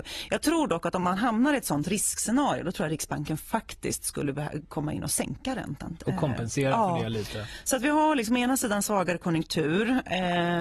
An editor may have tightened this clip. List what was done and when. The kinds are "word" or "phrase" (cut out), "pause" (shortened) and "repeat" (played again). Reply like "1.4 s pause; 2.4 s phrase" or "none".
none